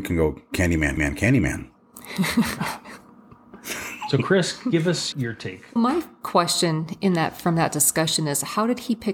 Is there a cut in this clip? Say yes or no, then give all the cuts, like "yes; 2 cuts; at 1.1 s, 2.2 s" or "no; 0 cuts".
yes; 3 cuts; at 1.0 s, 5.1 s, 5.8 s